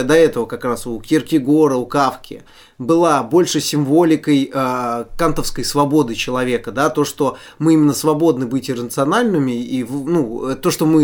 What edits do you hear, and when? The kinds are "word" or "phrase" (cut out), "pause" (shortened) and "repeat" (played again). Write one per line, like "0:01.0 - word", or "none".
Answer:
none